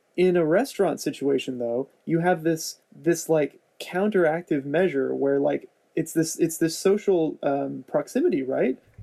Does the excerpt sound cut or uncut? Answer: cut